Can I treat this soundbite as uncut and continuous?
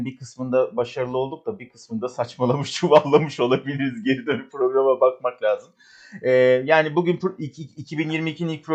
yes; 0 cuts

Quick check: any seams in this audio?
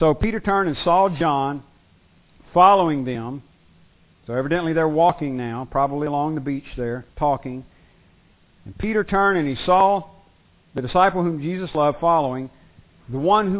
yes; 1 cut; at 7.1 s

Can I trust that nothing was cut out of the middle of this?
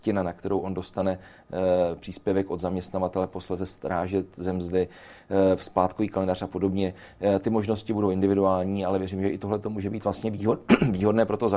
yes; 0 cuts

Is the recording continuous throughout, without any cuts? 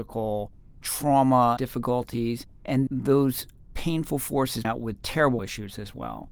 no; 4 cuts; at 1.6 s, 2.9 s, 4.6 s, 5.4 s

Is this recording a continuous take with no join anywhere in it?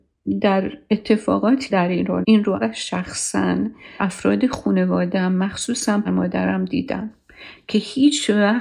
no; 5 cuts; at 1.7 s, 2.2 s, 2.6 s, 4.0 s, 6.0 s

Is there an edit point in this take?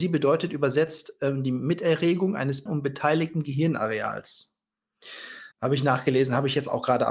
yes; 2 cuts; at 2.7 s, 5.5 s

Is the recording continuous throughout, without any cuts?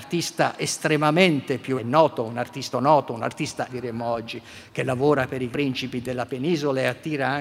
no; 4 cuts; at 1.8 s, 2.7 s, 3.7 s, 5.5 s

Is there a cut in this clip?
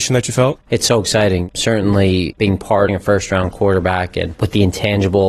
yes; 1 cut; at 2.9 s

